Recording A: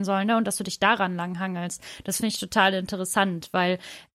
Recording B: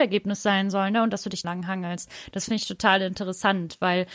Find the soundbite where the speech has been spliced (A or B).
B